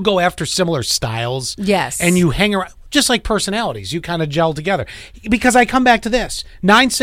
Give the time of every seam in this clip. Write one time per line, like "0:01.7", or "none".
none